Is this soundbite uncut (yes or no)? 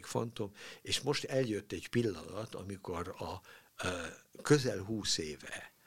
yes